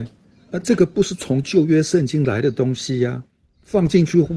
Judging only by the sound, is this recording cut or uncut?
uncut